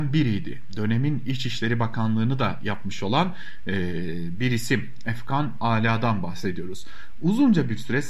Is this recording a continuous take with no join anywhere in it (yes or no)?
yes